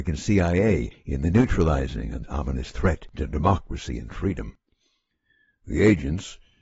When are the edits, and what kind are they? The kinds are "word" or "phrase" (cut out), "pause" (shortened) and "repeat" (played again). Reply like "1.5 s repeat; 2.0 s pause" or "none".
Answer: 2.2 s word